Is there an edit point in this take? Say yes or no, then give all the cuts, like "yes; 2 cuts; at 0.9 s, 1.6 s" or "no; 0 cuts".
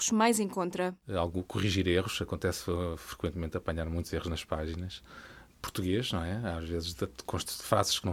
no; 0 cuts